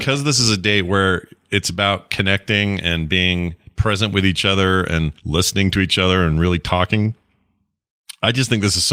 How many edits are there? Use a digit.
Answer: 1